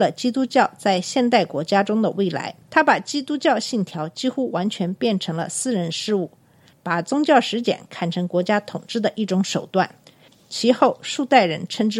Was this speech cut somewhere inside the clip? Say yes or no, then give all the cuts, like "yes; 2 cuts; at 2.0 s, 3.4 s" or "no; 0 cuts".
yes; 1 cut; at 2.6 s